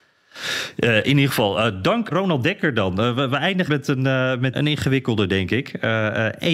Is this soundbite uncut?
no; 3 cuts; at 2.1 s, 3.7 s, 4.5 s

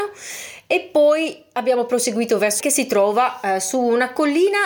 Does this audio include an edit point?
yes; 1 cut; at 2.6 s

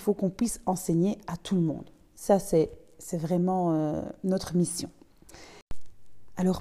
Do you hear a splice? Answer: no; 0 cuts

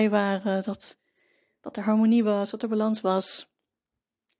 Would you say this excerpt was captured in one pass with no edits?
yes; 0 cuts

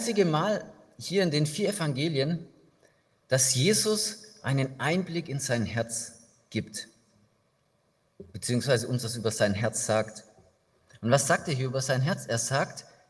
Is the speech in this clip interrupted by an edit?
yes; 1 cut; at 8.3 s

